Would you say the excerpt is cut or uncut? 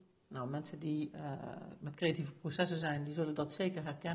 uncut